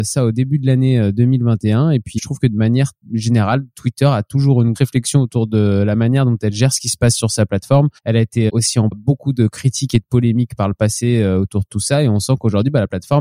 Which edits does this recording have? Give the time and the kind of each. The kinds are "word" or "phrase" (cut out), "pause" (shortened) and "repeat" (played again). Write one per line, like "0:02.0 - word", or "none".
0:02.2 - word
0:03.0 - pause
0:04.8 - word
0:08.0 - pause
0:08.5 - word
0:08.9 - word